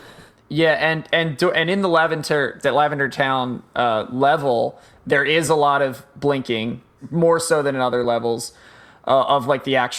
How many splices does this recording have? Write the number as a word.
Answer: zero